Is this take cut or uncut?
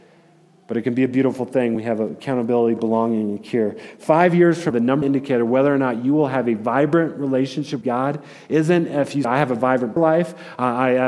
cut